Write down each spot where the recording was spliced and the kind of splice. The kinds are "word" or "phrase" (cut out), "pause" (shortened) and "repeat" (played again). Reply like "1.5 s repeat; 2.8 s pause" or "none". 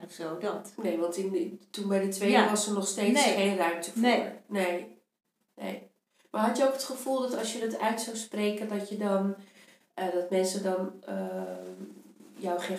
none